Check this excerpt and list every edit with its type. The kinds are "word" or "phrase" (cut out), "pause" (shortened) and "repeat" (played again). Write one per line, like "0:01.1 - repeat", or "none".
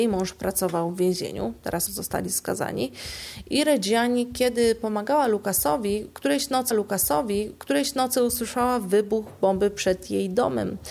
0:01.9 - phrase
0:06.7 - repeat